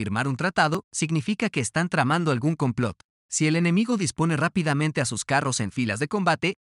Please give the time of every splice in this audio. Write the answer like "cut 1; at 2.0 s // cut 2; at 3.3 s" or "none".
cut 1; at 3.1 s